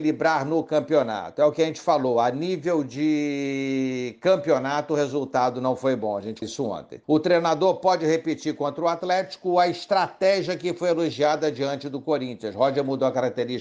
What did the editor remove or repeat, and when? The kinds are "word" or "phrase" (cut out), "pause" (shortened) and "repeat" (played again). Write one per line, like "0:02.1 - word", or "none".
0:06.4 - word
0:07.0 - pause